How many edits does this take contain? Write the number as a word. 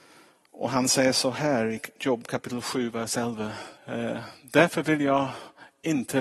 one